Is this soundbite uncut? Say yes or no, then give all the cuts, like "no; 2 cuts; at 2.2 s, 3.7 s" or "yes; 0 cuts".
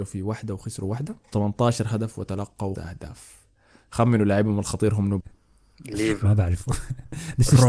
no; 3 cuts; at 1.3 s, 2.8 s, 5.2 s